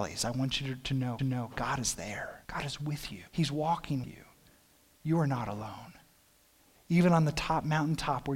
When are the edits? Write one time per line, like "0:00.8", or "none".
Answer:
0:01.2
0:02.4
0:03.3
0:04.0